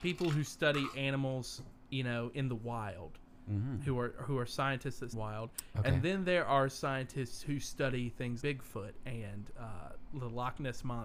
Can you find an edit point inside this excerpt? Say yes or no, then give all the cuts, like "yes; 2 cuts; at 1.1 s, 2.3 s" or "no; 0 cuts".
yes; 2 cuts; at 5.1 s, 8.4 s